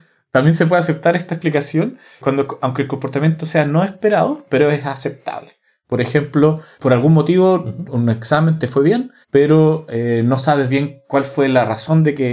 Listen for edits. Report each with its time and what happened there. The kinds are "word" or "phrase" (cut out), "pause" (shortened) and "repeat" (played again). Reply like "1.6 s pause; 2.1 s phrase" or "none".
9.2 s pause